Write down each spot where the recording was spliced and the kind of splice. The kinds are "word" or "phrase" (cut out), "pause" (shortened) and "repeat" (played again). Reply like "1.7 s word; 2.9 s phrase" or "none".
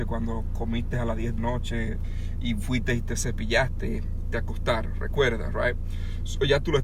1.4 s word; 4.3 s phrase